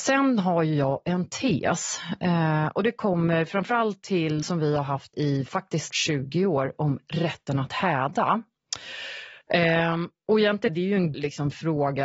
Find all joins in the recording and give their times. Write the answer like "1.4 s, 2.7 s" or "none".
4.4 s, 5.1 s, 5.9 s, 9.4 s, 10.7 s, 11.1 s